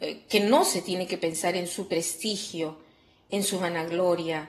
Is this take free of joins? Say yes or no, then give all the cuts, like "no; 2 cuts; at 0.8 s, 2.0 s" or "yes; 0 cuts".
yes; 0 cuts